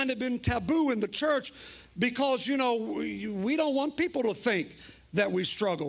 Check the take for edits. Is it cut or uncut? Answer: uncut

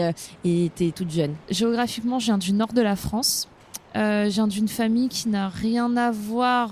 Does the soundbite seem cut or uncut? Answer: cut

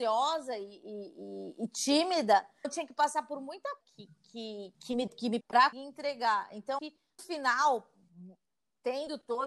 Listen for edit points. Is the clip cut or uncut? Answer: cut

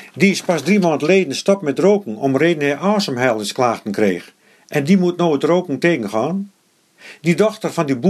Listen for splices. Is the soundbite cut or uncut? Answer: uncut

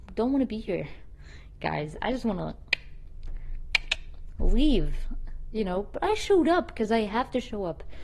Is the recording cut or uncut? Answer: uncut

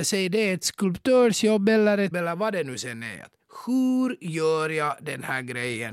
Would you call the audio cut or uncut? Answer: cut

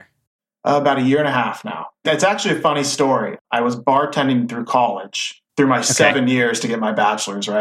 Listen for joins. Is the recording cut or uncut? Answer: uncut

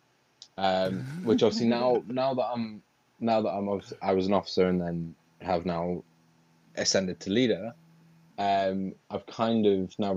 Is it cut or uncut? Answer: uncut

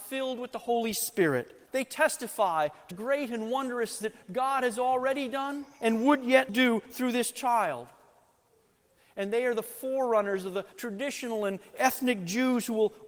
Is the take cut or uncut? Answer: cut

